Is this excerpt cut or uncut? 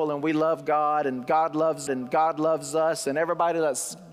cut